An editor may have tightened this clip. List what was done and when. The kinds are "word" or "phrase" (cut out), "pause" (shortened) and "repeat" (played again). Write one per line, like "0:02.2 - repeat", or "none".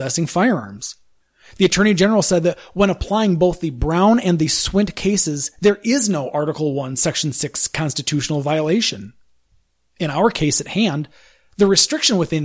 none